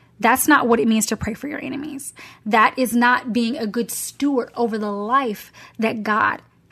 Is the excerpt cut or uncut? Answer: uncut